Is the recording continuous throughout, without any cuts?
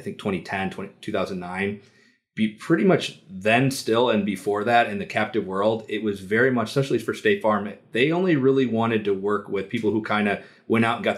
yes; 0 cuts

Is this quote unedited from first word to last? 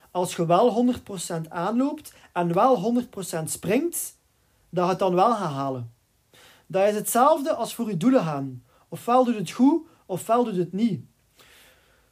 yes; 0 cuts

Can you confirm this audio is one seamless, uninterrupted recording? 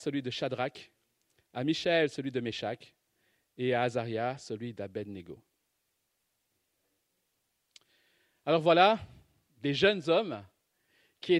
yes; 0 cuts

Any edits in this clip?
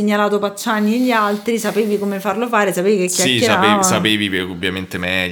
no; 0 cuts

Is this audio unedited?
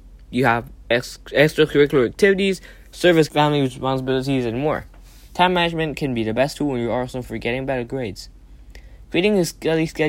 no; 2 cuts; at 0.9 s, 3.3 s

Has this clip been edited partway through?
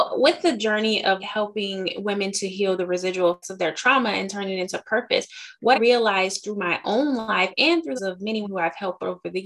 yes; 5 cuts; at 1.2 s, 3.4 s, 5.7 s, 8.0 s, 8.4 s

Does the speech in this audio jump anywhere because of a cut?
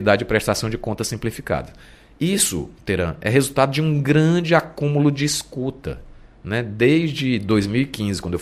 no; 0 cuts

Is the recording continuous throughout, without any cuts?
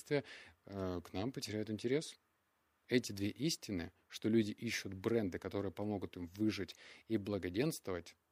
yes; 0 cuts

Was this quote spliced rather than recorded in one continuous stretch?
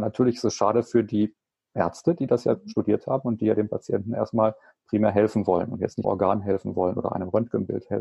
yes; 1 cut; at 6.0 s

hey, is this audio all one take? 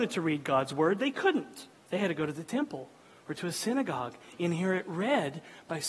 no; 1 cut; at 1.7 s

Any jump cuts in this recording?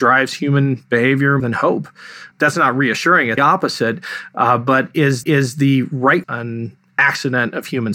yes; 5 cuts; at 1.4 s, 2.3 s, 3.4 s, 5.2 s, 6.2 s

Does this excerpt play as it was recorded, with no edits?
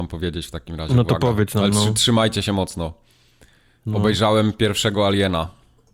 yes; 0 cuts

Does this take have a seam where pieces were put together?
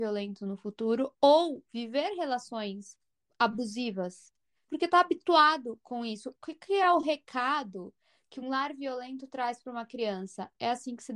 no; 0 cuts

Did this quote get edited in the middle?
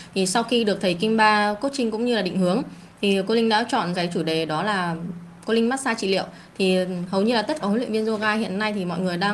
yes; 2 cuts; at 3.9 s, 7.6 s

